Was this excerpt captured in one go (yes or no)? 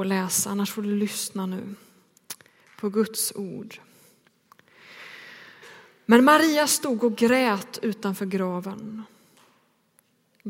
yes